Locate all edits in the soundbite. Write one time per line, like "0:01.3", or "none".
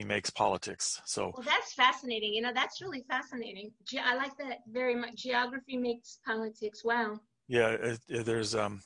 none

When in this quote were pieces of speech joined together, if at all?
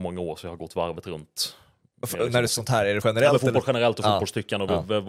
0:02.5
0:03.0

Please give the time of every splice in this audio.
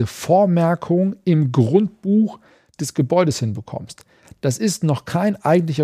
none

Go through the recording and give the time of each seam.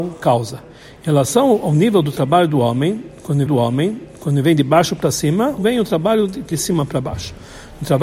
0:03.5
0:05.6
0:06.5

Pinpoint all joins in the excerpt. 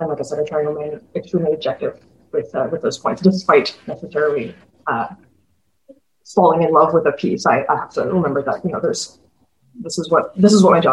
none

